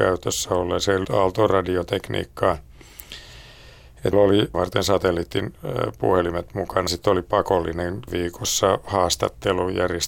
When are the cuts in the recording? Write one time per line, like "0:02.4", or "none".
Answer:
0:01.0
0:04.1
0:04.5
0:06.9
0:08.1